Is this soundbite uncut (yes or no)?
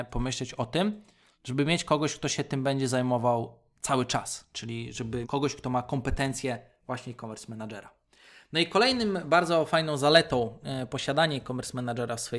no